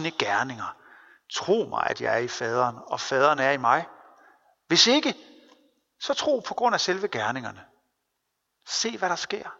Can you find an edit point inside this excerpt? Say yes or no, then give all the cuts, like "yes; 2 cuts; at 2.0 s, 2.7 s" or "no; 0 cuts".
no; 0 cuts